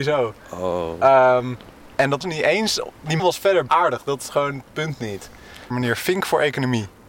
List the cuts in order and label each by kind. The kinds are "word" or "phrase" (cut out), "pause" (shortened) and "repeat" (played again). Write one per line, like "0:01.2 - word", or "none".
0:02.2 - word
0:03.2 - word
0:03.7 - word
0:05.7 - word